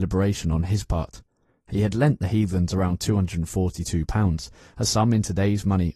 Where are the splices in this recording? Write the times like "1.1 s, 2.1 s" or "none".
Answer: none